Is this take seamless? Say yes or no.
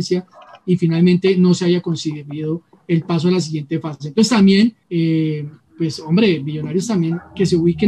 no